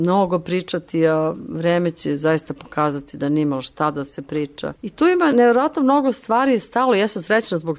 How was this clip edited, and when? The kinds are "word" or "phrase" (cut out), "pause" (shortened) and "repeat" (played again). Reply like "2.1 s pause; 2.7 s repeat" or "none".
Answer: 4.8 s pause